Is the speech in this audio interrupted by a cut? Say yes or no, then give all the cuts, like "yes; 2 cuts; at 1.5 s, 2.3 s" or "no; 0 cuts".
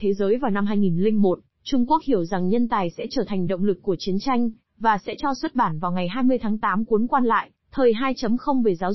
no; 0 cuts